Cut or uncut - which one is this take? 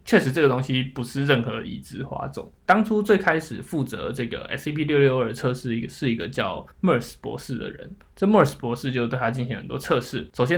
cut